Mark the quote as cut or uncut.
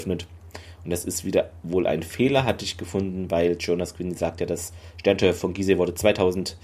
uncut